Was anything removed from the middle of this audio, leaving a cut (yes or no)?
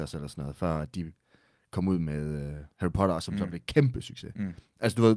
no